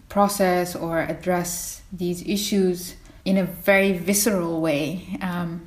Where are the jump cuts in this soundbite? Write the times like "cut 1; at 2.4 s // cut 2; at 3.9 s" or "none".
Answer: cut 1; at 3.2 s